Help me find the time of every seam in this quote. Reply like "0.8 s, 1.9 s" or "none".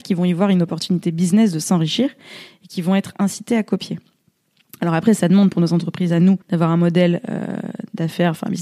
6.4 s